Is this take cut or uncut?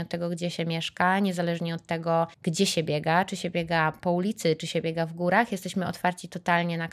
cut